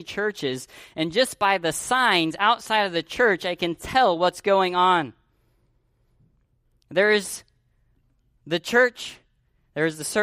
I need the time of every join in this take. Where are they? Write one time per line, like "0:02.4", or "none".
none